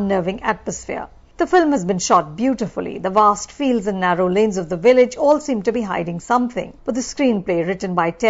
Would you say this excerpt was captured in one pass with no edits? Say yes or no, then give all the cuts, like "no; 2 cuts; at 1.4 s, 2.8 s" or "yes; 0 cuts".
yes; 0 cuts